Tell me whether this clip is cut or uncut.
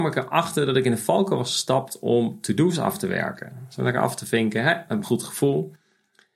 cut